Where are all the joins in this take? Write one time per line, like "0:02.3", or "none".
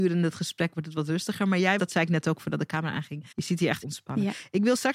0:01.8
0:03.3
0:03.8